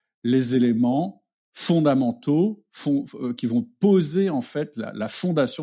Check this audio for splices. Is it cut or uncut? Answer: uncut